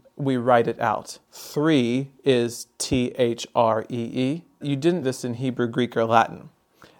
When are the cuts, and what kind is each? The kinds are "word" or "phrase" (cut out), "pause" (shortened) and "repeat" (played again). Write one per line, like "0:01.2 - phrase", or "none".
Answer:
0:01.3 - word
0:04.6 - phrase
0:05.0 - word